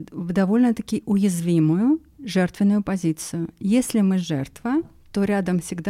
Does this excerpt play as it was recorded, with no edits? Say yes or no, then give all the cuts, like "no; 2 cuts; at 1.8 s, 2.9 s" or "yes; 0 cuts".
yes; 0 cuts